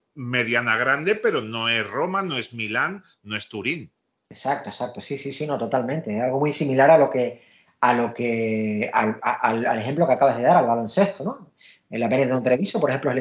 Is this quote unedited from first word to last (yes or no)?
yes